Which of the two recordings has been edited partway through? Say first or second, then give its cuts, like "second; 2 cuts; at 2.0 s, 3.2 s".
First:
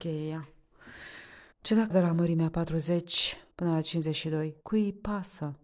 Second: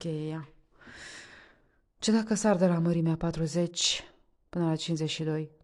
first; 4 cuts; at 1.5 s, 1.9 s, 3.5 s, 4.6 s